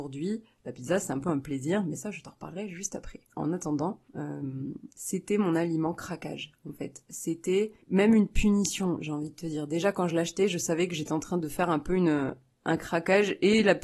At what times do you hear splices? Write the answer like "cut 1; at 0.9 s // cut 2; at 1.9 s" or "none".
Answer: cut 1; at 3.2 s // cut 2; at 4.1 s // cut 3; at 7.8 s